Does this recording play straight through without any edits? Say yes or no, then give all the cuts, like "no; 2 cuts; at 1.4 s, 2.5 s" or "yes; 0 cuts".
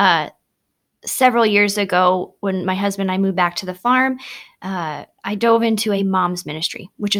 yes; 0 cuts